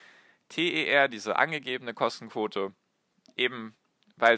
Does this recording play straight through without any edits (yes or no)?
yes